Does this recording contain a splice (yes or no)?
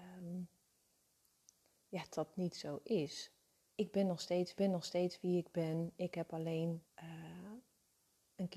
yes